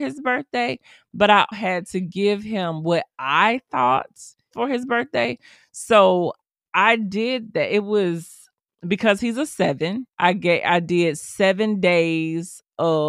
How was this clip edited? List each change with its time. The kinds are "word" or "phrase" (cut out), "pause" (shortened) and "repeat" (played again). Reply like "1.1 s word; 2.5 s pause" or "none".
1.5 s word; 4.5 s phrase; 10.1 s pause